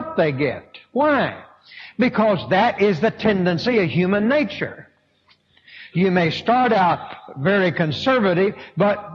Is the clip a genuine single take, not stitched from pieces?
yes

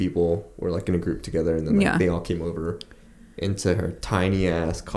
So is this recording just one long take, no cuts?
yes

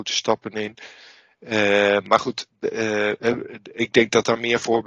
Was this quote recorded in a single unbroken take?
yes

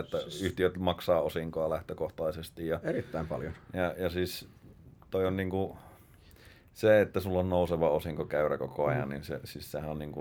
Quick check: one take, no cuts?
yes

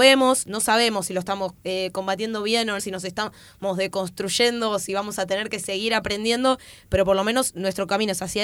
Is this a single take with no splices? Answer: no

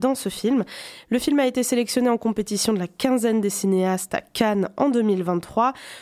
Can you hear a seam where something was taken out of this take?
no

